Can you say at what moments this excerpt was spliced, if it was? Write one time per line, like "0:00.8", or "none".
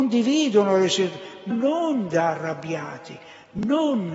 0:01.5